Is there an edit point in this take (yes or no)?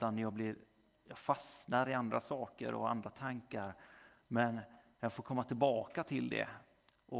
no